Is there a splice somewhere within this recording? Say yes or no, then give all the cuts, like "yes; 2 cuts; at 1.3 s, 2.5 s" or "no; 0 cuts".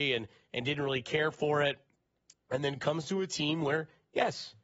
no; 0 cuts